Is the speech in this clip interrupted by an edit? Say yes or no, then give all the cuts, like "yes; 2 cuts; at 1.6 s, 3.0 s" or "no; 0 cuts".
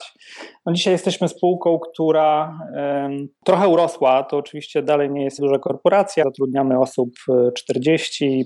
yes; 3 cuts; at 3.4 s, 5.4 s, 6.2 s